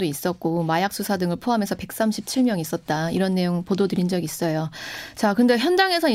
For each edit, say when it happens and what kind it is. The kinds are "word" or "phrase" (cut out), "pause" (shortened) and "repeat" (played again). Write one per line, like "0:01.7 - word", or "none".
none